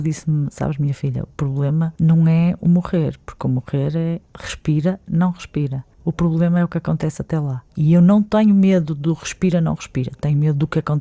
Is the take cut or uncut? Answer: cut